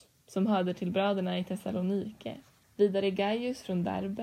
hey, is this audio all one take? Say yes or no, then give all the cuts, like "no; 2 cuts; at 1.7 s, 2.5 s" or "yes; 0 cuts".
yes; 0 cuts